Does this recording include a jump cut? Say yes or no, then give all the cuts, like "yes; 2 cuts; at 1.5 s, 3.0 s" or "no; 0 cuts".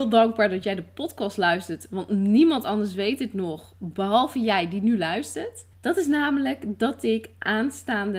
yes; 1 cut; at 5.7 s